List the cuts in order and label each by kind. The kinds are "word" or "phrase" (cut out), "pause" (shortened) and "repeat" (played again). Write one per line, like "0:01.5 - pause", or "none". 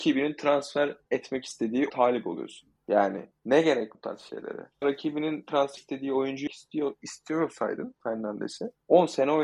0:01.9 - word
0:02.8 - pause
0:03.9 - word
0:04.8 - word
0:05.8 - word
0:06.5 - word
0:08.0 - phrase